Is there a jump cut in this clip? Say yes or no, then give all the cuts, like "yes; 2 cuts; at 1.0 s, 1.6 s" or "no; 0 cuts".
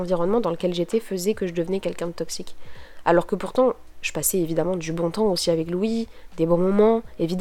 no; 0 cuts